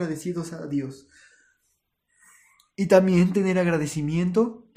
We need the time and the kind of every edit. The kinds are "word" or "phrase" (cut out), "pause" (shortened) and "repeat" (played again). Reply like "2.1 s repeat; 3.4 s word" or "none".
none